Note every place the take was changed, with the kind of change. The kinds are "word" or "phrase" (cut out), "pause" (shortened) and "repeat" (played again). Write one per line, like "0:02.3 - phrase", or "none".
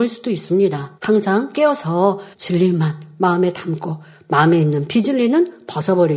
0:01.0 - pause
0:02.3 - pause